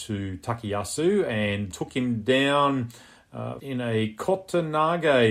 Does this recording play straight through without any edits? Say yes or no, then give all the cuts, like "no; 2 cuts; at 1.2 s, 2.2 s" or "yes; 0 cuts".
no; 2 cuts; at 1.7 s, 3.6 s